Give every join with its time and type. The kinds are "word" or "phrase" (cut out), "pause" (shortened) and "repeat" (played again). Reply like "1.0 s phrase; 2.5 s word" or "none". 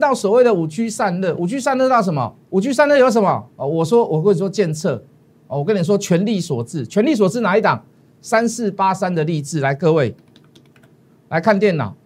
2.4 s pause; 3.5 s pause